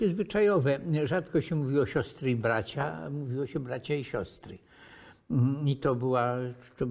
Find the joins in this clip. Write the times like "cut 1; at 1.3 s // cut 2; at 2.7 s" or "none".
none